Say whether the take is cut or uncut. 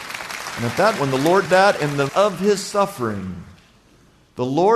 cut